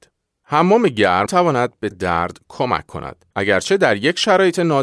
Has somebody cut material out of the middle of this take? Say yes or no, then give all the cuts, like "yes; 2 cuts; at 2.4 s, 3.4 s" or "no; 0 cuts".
yes; 3 cuts; at 1.3 s, 1.9 s, 3.3 s